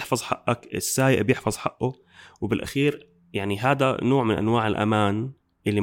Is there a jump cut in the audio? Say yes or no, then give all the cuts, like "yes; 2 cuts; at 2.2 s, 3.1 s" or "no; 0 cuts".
no; 0 cuts